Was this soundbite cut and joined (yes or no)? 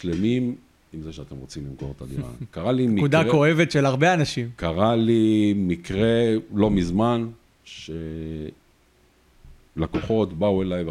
no